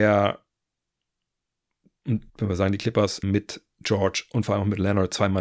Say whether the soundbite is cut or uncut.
cut